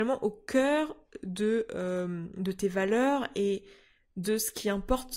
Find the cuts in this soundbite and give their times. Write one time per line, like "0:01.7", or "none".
none